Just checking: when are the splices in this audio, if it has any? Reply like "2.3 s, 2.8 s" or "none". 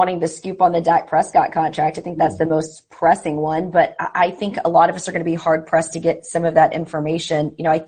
none